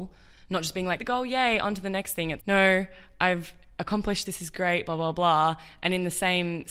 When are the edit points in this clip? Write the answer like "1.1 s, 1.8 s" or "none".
1.0 s, 2.4 s, 4.3 s